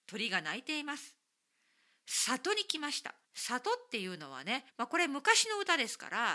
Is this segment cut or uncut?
cut